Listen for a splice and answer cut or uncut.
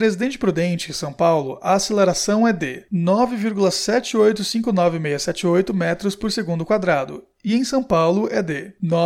uncut